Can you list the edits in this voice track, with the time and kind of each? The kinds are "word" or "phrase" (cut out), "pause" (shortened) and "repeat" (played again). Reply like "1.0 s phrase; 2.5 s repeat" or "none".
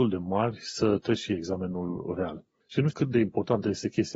2.6 s pause; 2.9 s word